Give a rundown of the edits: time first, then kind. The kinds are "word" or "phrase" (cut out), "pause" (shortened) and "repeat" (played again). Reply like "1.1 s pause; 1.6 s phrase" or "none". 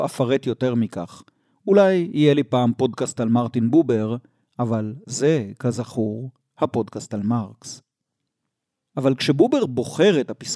none